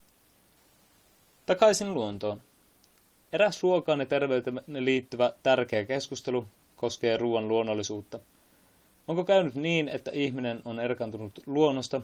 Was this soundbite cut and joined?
no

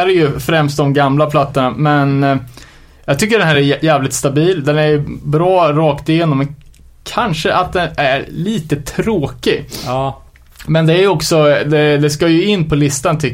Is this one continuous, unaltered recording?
yes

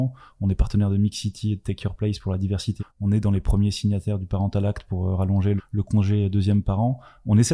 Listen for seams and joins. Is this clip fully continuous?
no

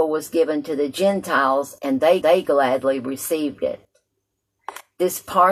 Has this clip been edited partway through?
yes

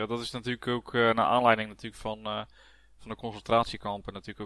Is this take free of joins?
yes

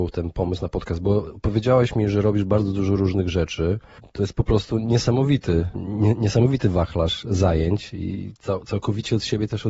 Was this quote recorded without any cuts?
yes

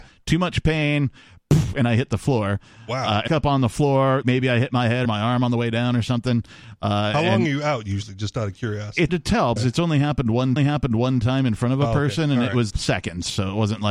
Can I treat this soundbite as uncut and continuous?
no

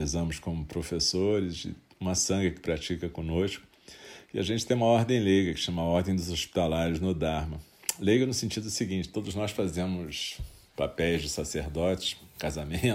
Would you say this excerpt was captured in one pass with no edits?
yes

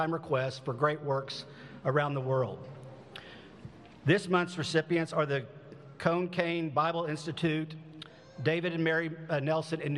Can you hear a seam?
no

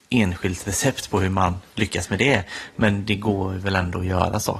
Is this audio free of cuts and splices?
yes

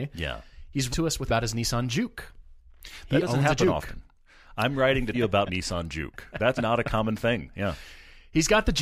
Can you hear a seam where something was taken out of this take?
yes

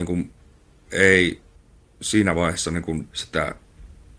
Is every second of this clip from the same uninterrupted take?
yes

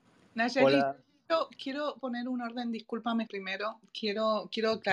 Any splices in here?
yes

